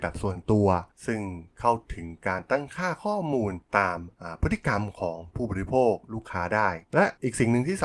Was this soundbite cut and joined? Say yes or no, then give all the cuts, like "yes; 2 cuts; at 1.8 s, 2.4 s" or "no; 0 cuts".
yes; 1 cut; at 6.8 s